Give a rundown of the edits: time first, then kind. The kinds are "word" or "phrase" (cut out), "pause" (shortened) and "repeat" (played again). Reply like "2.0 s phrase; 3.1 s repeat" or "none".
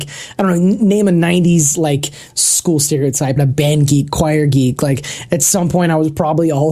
3.4 s phrase